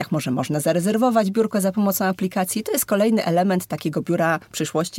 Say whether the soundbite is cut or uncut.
uncut